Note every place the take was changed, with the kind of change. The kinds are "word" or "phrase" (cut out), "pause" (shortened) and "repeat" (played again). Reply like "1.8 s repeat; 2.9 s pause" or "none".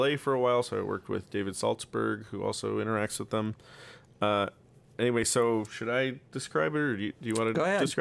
none